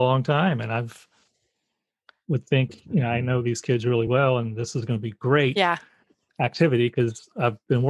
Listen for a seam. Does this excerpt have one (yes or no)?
no